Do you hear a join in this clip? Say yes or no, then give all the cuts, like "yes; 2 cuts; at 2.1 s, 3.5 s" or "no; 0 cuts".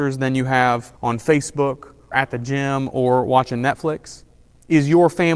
yes; 2 cuts; at 1.0 s, 2.1 s